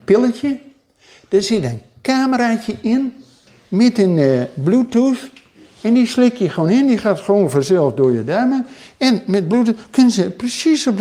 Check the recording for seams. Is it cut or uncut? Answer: uncut